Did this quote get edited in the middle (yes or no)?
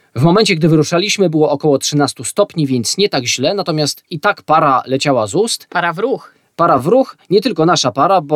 no